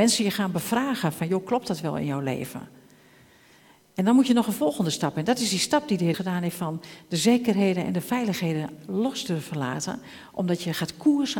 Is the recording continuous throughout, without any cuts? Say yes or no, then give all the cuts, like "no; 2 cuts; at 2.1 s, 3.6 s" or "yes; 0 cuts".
no; 1 cut; at 6.1 s